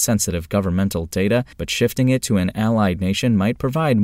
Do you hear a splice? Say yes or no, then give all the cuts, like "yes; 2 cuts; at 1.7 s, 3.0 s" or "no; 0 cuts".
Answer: yes; 1 cut; at 1.5 s